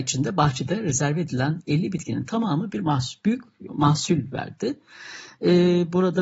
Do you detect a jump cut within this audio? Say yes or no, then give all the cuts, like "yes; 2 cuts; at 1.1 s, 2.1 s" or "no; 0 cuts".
yes; 2 cuts; at 2.7 s, 3.7 s